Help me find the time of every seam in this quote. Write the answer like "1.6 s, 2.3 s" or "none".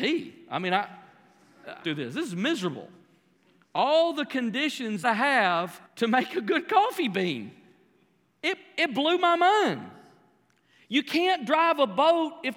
1.8 s, 5.0 s, 5.9 s